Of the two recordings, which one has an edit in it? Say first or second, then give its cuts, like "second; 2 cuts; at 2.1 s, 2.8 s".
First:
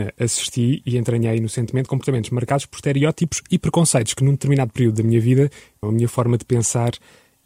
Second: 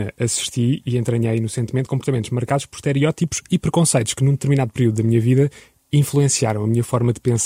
first; 1 cut; at 5.8 s